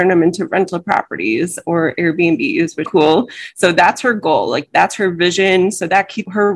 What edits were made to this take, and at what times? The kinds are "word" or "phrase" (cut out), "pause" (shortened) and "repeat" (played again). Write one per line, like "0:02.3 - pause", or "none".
0:02.8 - phrase